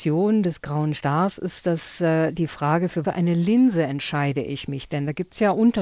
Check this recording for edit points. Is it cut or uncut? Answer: cut